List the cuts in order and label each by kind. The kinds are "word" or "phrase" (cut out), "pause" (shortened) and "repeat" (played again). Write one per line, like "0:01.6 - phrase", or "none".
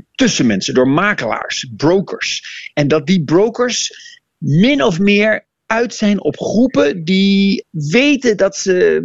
none